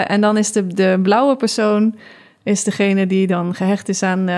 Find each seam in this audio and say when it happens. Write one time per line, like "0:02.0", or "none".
none